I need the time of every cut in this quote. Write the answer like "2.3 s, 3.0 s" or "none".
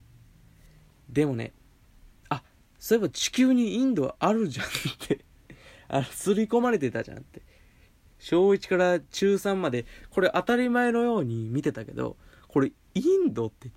12.8 s